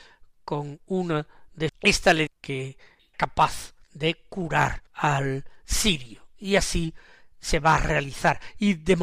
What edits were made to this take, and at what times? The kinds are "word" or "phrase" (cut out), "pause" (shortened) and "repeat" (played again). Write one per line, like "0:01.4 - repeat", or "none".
0:01.7 - phrase
0:02.3 - word
0:03.1 - phrase
0:03.8 - pause
0:04.9 - pause